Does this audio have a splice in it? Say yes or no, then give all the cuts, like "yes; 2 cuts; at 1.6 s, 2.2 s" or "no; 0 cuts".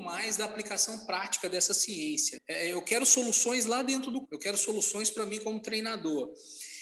yes; 2 cuts; at 2.4 s, 4.2 s